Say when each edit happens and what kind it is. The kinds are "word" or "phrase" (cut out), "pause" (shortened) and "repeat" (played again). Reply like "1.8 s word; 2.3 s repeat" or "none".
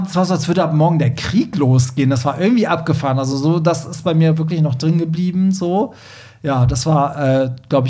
none